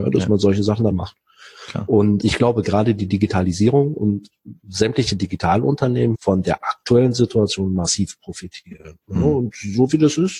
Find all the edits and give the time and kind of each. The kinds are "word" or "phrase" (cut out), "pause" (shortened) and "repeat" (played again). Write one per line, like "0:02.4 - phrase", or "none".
0:00.9 - phrase
0:02.2 - word
0:04.6 - pause
0:06.1 - phrase
0:09.0 - pause